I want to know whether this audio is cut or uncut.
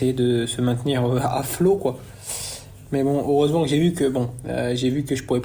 uncut